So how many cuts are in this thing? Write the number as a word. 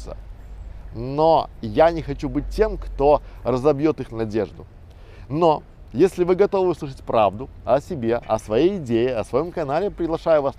zero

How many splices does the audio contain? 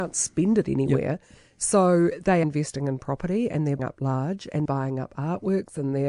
three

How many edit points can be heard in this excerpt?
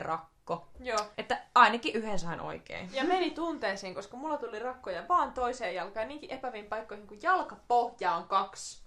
one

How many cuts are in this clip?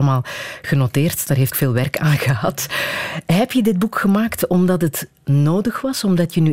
one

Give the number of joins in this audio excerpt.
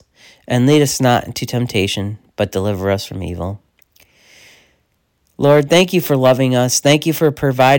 zero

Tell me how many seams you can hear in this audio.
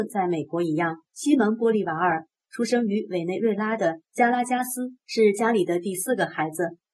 two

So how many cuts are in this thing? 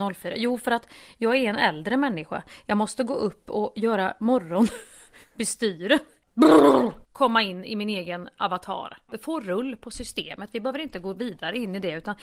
one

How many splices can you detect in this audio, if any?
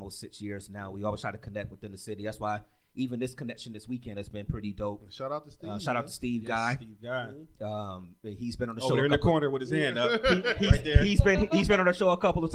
zero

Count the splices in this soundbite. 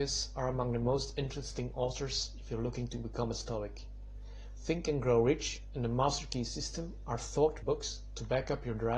one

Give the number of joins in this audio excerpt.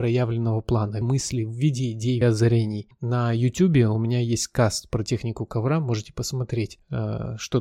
two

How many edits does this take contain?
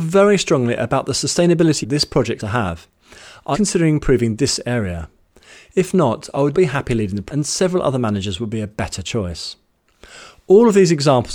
five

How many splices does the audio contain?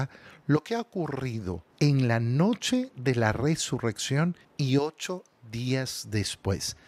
two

